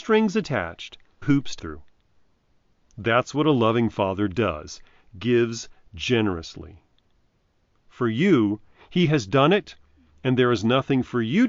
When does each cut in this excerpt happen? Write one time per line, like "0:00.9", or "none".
0:01.2
0:01.6